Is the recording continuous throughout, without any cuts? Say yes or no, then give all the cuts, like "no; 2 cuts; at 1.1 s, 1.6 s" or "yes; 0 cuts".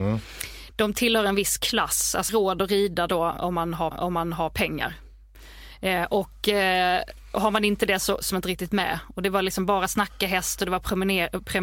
no; 3 cuts; at 2.3 s, 3.9 s, 8.3 s